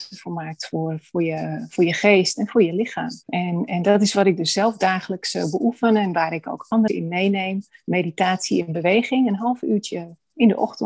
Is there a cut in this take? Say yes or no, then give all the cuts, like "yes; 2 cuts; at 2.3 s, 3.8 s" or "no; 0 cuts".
yes; 2 cuts; at 3.2 s, 6.9 s